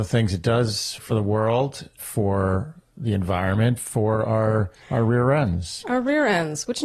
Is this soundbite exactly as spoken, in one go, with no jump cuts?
no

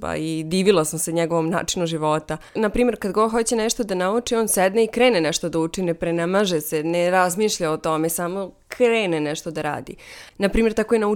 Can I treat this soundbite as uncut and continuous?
no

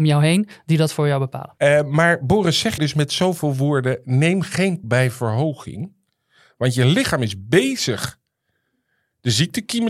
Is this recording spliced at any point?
yes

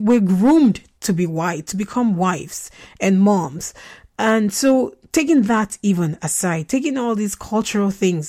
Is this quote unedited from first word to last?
yes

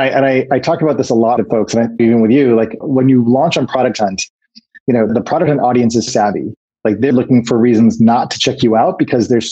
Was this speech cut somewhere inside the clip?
yes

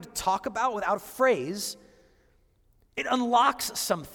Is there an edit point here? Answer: no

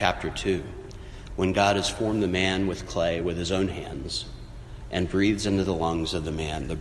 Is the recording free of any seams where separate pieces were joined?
yes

